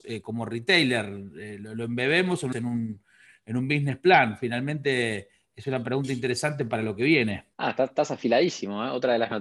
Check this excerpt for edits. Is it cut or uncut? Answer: cut